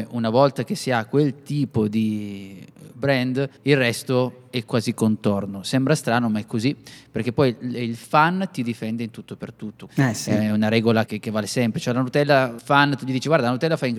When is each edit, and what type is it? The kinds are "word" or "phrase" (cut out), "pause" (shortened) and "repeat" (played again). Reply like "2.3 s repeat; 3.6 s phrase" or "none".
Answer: 3.6 s pause; 9.9 s word; 11.1 s word; 12.6 s word